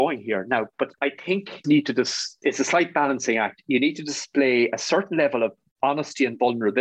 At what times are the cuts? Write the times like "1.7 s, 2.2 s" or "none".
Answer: 1.6 s, 2.4 s